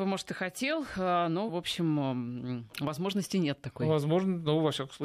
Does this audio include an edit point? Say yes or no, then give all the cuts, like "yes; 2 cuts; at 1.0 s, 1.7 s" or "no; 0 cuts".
yes; 1 cut; at 1.5 s